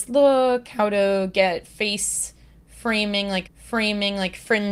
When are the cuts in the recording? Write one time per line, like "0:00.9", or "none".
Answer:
0:03.4